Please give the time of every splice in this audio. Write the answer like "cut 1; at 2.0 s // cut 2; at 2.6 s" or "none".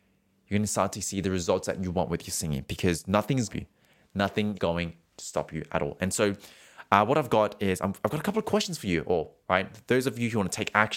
cut 1; at 3.5 s // cut 2; at 4.5 s // cut 3; at 9.4 s